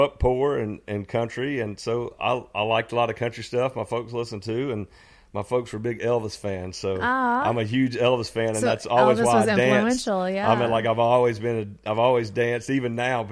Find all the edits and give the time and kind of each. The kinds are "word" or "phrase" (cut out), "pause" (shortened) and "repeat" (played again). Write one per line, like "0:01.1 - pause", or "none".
none